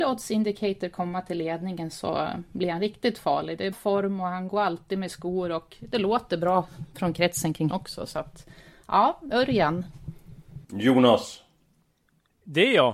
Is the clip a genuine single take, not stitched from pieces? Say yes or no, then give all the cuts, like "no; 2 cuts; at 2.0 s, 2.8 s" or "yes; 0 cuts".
no; 3 cuts; at 3.7 s, 7.7 s, 10.6 s